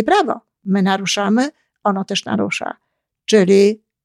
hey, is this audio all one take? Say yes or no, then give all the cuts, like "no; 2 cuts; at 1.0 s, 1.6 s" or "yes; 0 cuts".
yes; 0 cuts